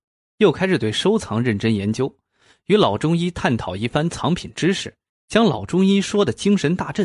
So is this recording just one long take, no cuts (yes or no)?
no